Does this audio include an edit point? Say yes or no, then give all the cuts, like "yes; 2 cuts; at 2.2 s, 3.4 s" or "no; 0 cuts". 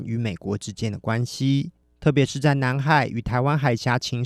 yes; 1 cut; at 1.8 s